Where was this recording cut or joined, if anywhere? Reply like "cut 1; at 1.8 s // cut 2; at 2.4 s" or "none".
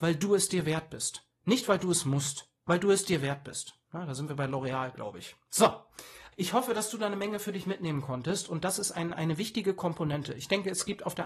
cut 1; at 3.8 s // cut 2; at 6.3 s